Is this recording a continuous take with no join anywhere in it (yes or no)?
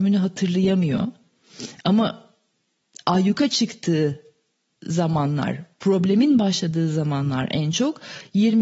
yes